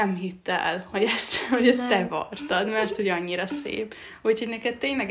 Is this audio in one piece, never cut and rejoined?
yes; 0 cuts

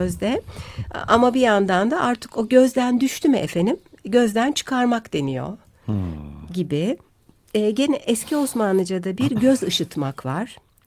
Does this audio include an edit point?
no; 0 cuts

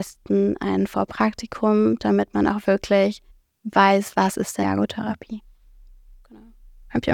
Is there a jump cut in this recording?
yes; 2 cuts; at 3.3 s, 4.6 s

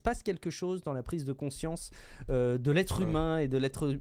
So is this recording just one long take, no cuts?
yes; 0 cuts

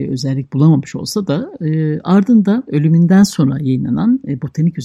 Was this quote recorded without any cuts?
yes; 0 cuts

